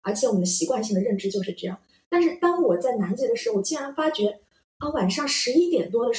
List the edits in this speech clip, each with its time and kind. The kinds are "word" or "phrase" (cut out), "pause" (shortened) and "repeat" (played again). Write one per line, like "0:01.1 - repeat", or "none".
none